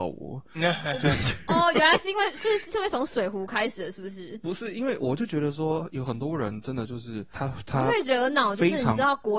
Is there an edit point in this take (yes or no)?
no